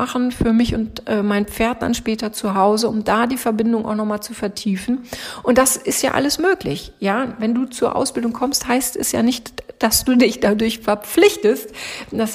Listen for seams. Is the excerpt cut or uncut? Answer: uncut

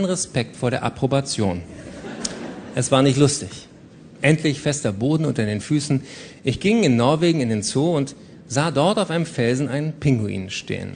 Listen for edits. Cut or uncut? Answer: uncut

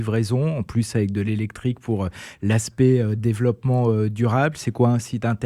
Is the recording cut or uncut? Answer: uncut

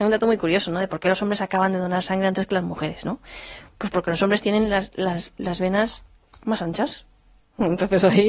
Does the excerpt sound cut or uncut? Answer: uncut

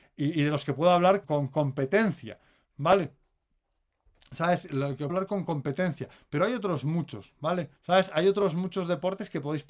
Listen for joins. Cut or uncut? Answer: cut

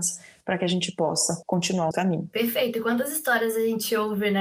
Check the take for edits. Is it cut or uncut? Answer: cut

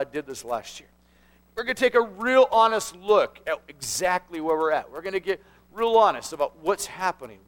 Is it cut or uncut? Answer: uncut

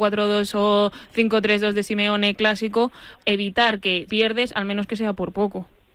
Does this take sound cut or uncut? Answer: cut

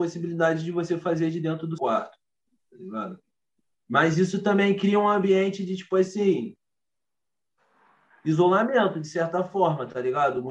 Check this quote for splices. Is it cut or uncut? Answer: cut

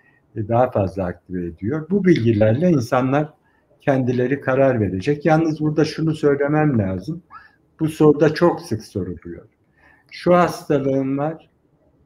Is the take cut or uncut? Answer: uncut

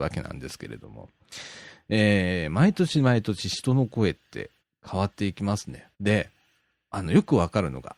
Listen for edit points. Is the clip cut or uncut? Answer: cut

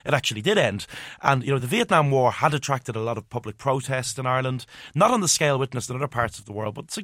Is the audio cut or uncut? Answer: uncut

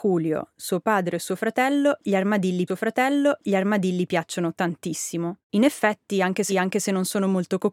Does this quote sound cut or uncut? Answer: cut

